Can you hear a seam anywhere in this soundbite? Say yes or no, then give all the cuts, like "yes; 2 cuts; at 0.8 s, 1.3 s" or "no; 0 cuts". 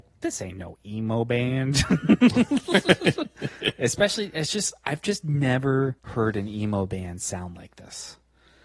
yes; 1 cut; at 6.0 s